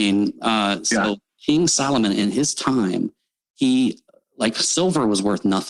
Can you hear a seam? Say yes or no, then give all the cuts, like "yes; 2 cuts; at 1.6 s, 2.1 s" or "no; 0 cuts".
no; 0 cuts